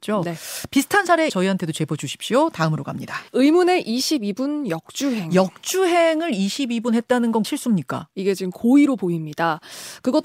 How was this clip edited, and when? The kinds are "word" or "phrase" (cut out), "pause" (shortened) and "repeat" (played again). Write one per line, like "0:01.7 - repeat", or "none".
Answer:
0:01.3 - word
0:03.3 - pause
0:07.4 - word